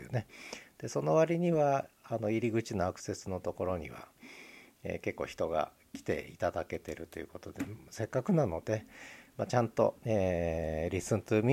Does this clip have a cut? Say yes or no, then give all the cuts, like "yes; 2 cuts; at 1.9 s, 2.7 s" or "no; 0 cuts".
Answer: yes; 1 cut; at 10.0 s